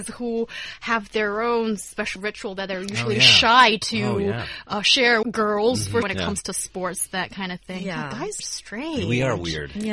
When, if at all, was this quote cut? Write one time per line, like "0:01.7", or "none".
0:02.2
0:05.2
0:06.0
0:08.4